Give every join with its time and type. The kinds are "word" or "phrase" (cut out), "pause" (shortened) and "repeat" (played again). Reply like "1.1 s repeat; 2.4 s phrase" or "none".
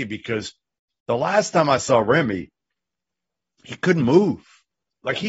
none